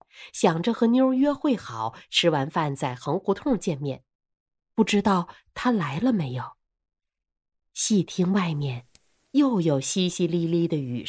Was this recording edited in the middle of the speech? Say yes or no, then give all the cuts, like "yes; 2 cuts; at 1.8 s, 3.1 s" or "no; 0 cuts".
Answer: no; 0 cuts